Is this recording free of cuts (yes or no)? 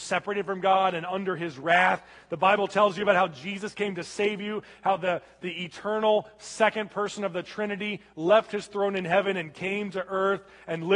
yes